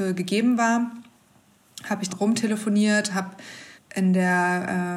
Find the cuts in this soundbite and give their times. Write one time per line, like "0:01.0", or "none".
0:02.1
0:03.8